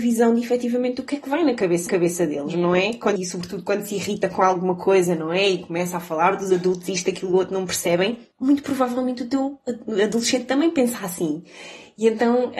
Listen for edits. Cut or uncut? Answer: cut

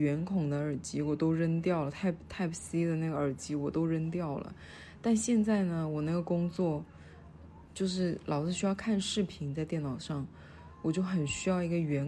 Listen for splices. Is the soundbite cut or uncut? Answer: uncut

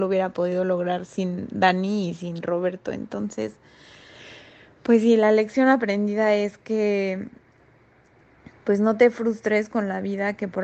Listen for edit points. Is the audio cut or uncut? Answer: uncut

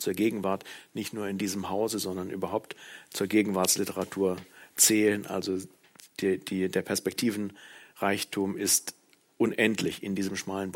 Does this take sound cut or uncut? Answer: uncut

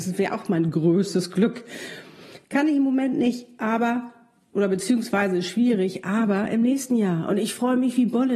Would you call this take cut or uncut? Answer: uncut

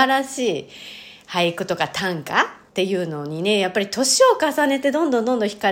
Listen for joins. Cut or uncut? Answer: cut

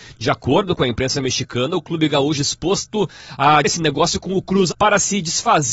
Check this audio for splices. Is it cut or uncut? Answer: cut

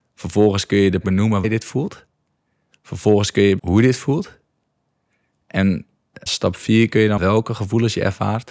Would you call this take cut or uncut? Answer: cut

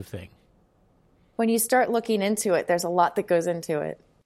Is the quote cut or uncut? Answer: uncut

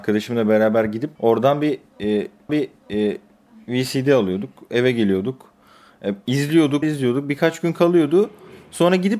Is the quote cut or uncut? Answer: cut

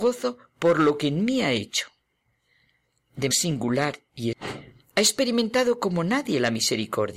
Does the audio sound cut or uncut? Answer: cut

